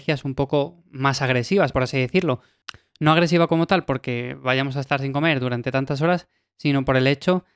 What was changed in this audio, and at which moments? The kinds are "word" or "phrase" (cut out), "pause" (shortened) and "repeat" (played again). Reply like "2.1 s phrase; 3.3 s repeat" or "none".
none